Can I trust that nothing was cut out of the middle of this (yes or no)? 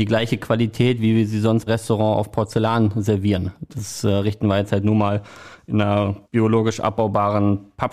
no